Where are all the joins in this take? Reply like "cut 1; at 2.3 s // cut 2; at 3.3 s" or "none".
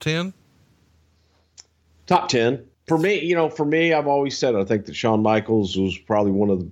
cut 1; at 1.8 s // cut 2; at 2.7 s